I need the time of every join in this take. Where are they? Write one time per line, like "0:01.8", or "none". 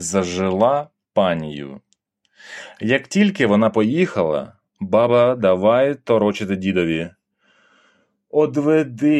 none